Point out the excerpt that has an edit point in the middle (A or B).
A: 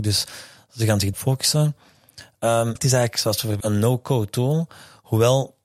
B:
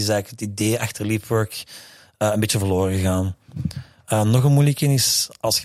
A